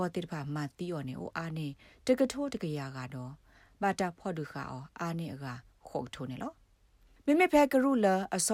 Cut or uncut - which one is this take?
uncut